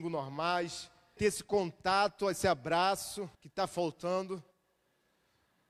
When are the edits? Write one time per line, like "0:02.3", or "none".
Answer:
0:01.2
0:03.3